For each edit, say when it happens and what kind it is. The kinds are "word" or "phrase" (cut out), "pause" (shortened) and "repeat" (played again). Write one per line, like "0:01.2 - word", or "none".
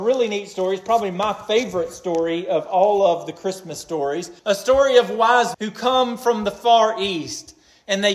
0:04.4 - pause
0:05.5 - word